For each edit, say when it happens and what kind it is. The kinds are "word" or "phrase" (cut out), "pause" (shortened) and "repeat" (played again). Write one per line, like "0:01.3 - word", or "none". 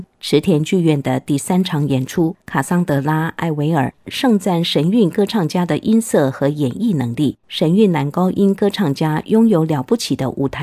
0:02.4 - pause
0:07.4 - pause